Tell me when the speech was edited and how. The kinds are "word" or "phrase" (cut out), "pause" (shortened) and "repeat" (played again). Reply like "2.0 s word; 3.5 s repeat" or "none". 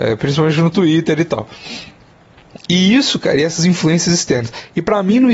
none